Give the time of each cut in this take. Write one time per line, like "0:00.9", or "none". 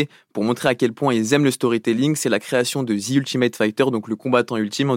none

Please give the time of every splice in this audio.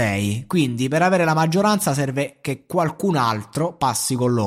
none

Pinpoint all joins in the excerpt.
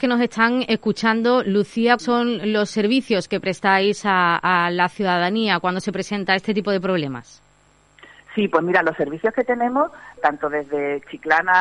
0:02.0
0:10.2

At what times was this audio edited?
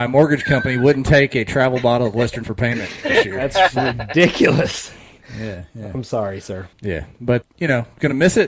0:02.4
0:06.7
0:07.4

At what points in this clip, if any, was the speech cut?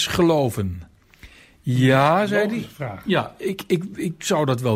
none

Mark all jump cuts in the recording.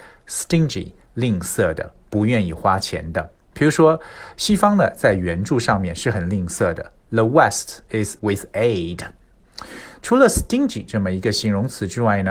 0:08.2

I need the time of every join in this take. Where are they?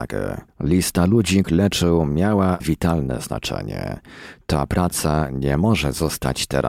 0:01.4
0:02.6

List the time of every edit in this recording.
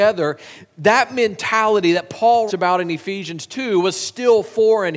0:02.5

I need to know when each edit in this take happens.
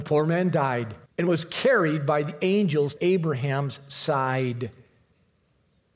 0:01.1
0:03.0

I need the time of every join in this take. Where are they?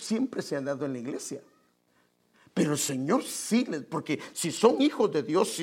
none

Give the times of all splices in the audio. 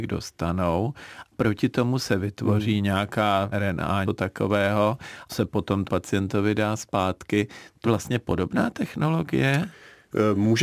0:01.3
0:03.5
0:04.1
0:05.3
0:05.9
0:07.8

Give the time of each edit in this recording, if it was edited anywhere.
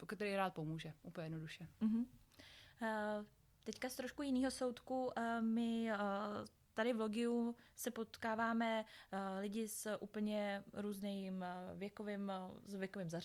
none

